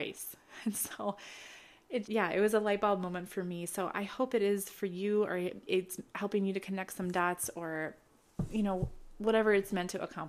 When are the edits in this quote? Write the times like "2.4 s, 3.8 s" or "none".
2.0 s, 5.7 s, 6.1 s